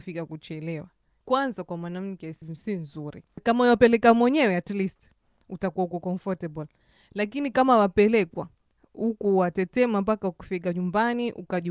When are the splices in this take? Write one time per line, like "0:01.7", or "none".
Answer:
none

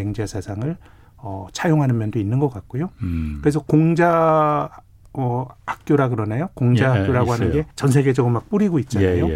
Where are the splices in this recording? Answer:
0:07.7

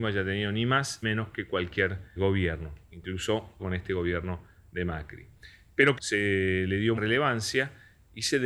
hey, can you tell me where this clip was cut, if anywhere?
0:01.0
0:02.2
0:03.6
0:06.0
0:07.0

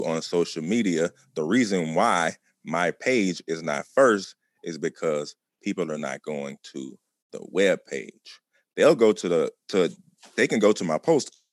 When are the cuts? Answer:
none

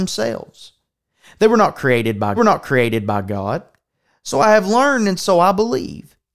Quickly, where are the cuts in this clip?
0:02.4

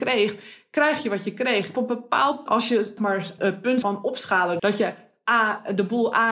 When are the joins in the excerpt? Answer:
0:01.7
0:02.5
0:03.0
0:03.4
0:03.8
0:04.6

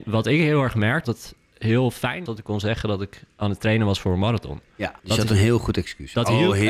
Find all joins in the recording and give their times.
0:01.0
0:02.3
0:05.0

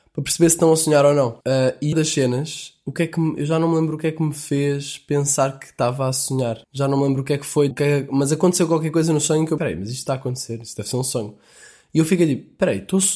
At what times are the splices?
0:01.4
0:01.9
0:06.6
0:07.7
0:09.6

